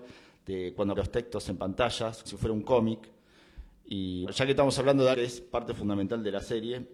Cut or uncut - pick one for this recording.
cut